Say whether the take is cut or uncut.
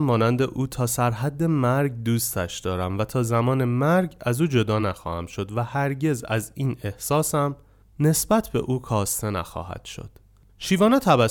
uncut